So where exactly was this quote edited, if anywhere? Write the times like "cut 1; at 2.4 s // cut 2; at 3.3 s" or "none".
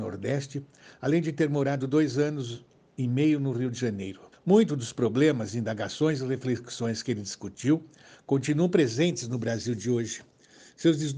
cut 1; at 4.3 s